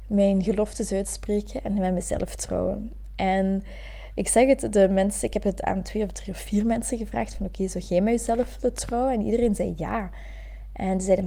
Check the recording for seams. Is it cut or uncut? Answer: uncut